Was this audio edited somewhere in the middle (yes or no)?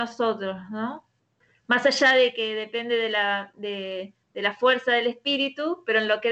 no